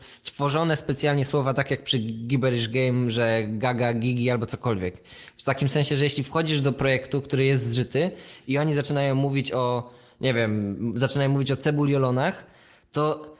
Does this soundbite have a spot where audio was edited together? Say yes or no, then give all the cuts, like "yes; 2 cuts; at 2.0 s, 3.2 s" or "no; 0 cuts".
no; 0 cuts